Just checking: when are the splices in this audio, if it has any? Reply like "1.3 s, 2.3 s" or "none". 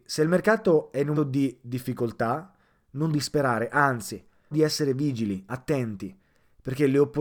1.2 s, 3.1 s, 4.5 s